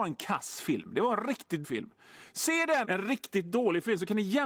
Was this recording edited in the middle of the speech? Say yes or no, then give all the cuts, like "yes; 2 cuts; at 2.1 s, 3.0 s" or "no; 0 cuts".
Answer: yes; 2 cuts; at 1.6 s, 2.8 s